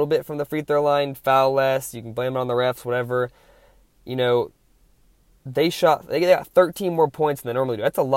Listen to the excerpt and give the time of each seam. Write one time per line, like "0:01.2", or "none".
none